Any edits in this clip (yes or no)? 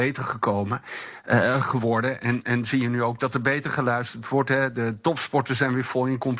no